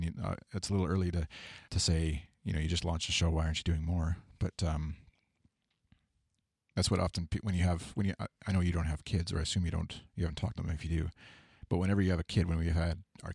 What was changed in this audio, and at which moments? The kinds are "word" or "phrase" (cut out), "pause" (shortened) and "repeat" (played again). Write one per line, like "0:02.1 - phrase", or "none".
0:01.7 - pause
0:10.1 - pause
0:10.5 - word